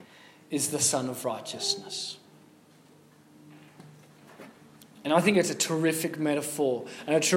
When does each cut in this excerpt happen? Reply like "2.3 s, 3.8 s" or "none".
none

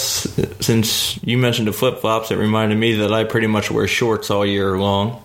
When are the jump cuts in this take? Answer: none

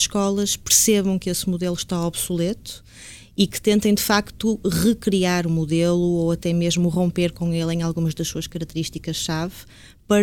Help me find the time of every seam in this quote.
none

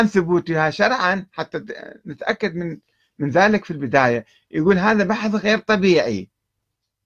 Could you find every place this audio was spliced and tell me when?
none

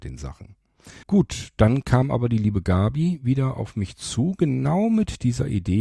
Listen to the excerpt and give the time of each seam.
1.0 s

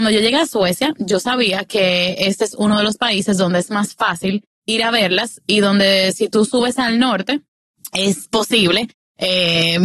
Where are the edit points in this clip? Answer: 4.5 s

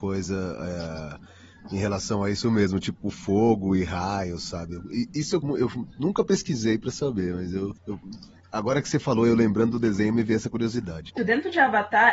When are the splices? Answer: 5.4 s, 7.8 s, 11.2 s

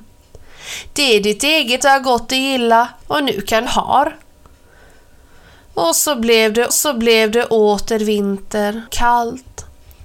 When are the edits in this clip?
1.8 s, 3.0 s, 3.7 s, 6.7 s, 8.9 s

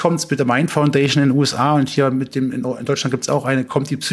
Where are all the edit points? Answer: none

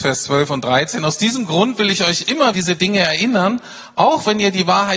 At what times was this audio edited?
2.5 s

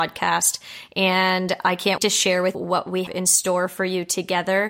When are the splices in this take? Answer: 2.0 s, 2.5 s, 3.1 s

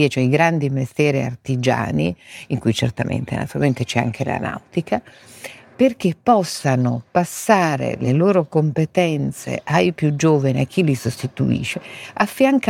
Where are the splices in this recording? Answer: none

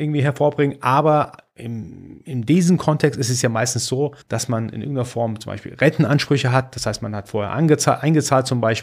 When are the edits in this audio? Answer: 4.2 s

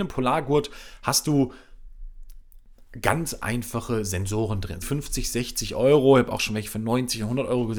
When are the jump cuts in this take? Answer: 4.8 s

